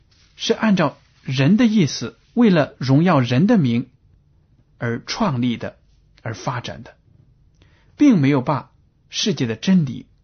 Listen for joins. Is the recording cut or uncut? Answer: cut